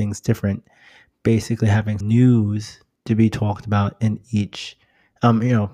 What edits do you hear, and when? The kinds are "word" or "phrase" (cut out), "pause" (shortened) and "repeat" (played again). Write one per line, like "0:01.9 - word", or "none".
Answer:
0:02.0 - word
0:03.0 - word